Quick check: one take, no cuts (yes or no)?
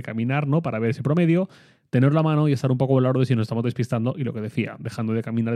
yes